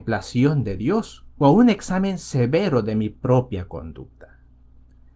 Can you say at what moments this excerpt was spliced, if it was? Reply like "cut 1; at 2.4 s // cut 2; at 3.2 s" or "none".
cut 1; at 1.3 s